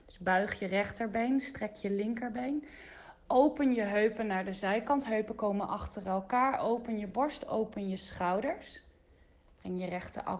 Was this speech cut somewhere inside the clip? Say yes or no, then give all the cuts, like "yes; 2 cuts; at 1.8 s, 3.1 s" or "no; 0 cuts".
no; 0 cuts